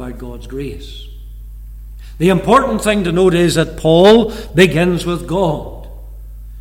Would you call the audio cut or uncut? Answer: uncut